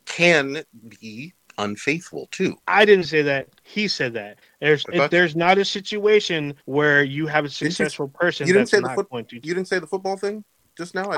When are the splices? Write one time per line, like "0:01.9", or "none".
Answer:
0:01.5
0:02.6
0:04.8
0:06.6